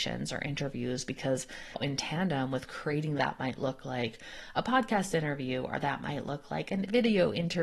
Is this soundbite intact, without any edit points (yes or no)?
no